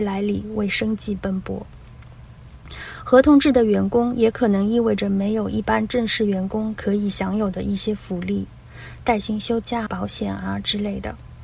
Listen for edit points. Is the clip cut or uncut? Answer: cut